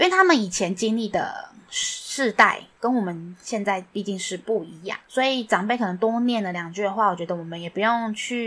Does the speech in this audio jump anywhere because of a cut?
yes; 1 cut; at 5.0 s

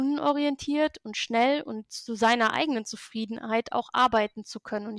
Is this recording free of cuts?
yes; 0 cuts

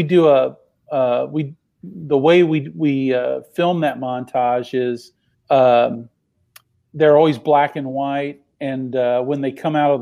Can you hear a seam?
yes; 1 cut; at 5.3 s

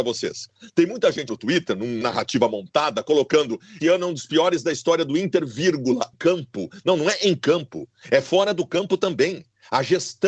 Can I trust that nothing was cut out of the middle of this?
no; 4 cuts; at 1.3 s, 2.0 s, 3.8 s, 6.1 s

